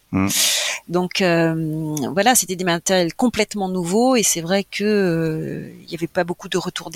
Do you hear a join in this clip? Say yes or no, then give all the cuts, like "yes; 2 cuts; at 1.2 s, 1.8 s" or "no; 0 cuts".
no; 0 cuts